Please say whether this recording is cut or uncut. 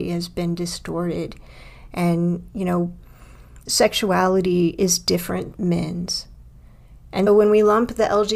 cut